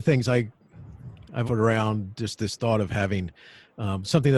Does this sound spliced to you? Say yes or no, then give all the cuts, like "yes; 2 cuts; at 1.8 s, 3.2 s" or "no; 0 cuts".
yes; 1 cut; at 1.4 s